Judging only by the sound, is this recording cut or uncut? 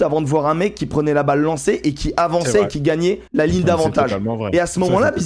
cut